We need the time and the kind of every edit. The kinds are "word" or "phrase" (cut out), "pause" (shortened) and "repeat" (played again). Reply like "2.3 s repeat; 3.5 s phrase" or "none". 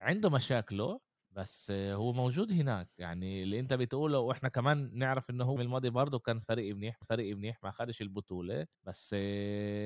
1.2 s pause; 5.6 s word; 7.0 s repeat; 8.7 s pause